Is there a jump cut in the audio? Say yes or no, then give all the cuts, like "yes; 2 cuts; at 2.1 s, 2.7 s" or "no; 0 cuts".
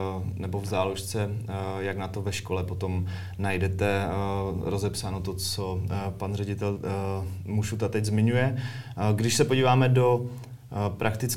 no; 0 cuts